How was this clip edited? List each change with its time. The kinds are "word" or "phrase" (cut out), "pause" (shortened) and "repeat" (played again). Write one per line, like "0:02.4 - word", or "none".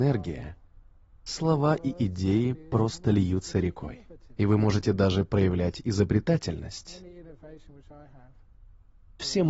none